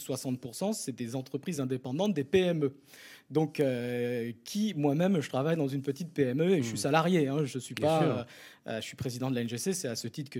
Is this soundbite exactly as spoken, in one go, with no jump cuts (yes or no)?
yes